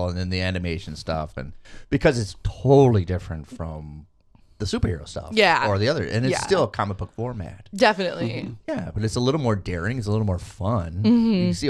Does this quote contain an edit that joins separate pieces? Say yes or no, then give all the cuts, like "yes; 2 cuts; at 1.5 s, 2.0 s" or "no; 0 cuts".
no; 0 cuts